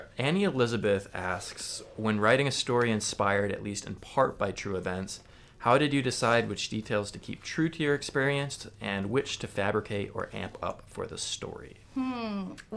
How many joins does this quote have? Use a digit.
0